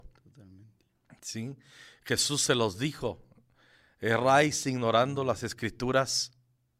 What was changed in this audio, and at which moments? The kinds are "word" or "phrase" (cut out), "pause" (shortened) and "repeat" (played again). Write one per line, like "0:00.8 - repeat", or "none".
none